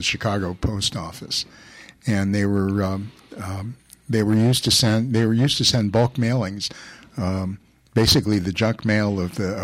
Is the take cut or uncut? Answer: uncut